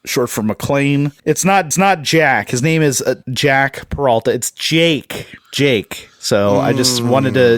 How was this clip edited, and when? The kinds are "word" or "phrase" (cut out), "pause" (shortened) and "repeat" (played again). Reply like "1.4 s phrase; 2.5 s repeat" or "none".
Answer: 1.2 s pause; 1.7 s repeat; 3.2 s word